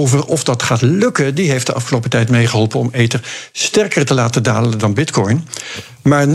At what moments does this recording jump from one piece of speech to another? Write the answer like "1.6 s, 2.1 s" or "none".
none

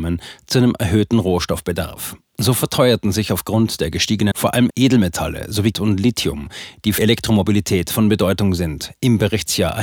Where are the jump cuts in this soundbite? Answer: 4.3 s, 4.7 s, 5.7 s, 7.0 s

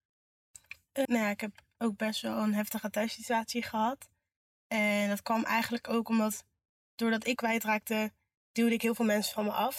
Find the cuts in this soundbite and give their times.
1.0 s, 7.4 s

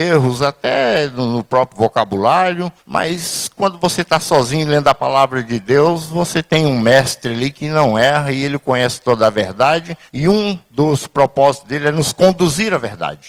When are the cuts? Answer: 2.8 s, 10.1 s, 10.6 s

